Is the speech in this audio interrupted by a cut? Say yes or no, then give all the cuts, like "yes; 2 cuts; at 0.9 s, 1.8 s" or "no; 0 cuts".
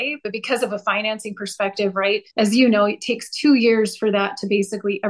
yes; 1 cut; at 2.3 s